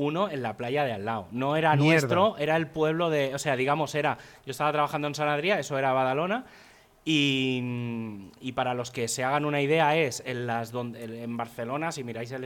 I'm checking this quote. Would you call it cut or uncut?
uncut